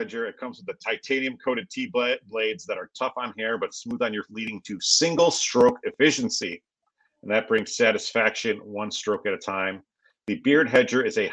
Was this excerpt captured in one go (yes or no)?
no